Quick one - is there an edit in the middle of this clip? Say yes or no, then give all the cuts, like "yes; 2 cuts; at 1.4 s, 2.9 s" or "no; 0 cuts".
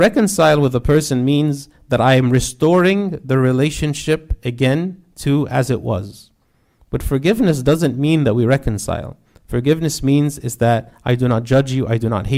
no; 0 cuts